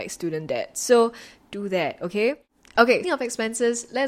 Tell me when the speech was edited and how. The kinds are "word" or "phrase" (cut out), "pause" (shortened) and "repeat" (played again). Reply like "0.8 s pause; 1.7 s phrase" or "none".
3.0 s word